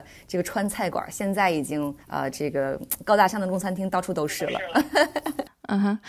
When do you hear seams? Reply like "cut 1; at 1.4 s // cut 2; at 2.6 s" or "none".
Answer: cut 1; at 2.0 s